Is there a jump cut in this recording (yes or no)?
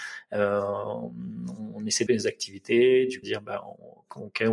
yes